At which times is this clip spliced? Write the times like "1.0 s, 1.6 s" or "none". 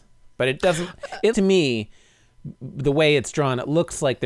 1.3 s